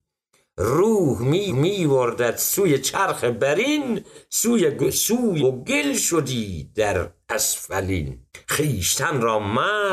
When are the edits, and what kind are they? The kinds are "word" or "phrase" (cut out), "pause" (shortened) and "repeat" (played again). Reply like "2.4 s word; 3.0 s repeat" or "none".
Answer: 1.5 s repeat; 5.4 s word; 8.3 s pause